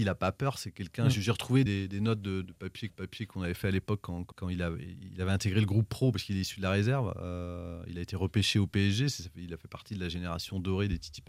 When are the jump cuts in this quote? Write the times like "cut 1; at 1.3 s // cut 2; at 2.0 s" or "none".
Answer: cut 1; at 1.7 s // cut 2; at 2.4 s // cut 3; at 2.9 s // cut 4; at 4.3 s